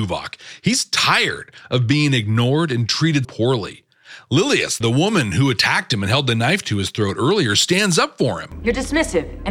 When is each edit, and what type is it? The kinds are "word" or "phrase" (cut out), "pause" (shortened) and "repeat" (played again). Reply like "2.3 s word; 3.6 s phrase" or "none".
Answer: 3.2 s word; 4.8 s word